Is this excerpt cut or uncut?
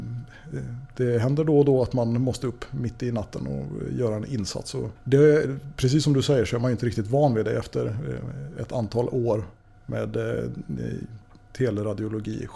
cut